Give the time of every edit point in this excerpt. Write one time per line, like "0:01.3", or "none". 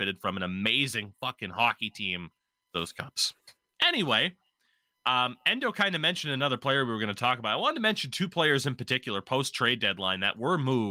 0:02.7